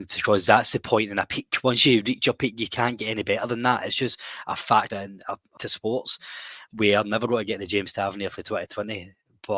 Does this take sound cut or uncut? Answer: cut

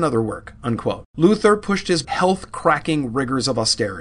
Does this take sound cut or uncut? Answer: cut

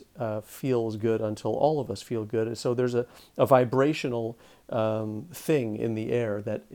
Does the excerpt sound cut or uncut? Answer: uncut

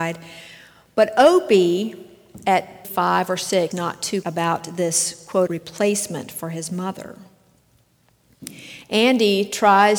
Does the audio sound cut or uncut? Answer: cut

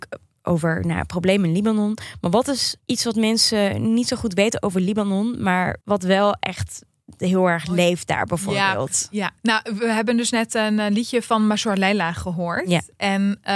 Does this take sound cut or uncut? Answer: cut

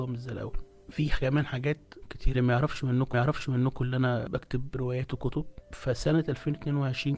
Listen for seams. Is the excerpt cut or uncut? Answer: cut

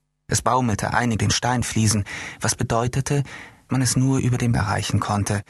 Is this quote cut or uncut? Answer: cut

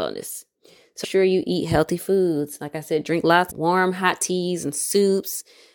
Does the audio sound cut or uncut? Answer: cut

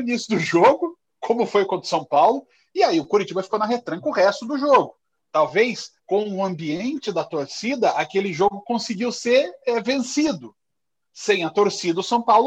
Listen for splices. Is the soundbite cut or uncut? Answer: cut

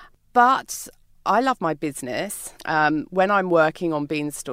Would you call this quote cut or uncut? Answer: cut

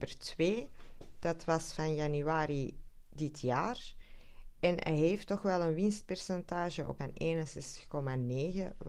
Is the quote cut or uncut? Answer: cut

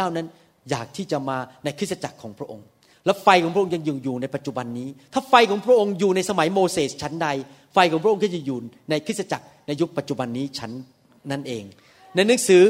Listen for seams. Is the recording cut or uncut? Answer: uncut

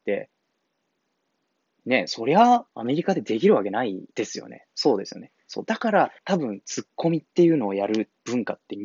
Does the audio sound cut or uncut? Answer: cut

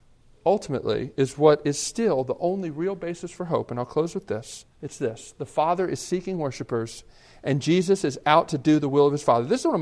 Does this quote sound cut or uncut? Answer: cut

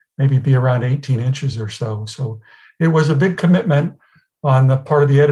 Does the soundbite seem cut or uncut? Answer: uncut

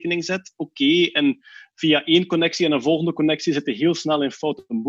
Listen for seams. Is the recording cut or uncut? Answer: uncut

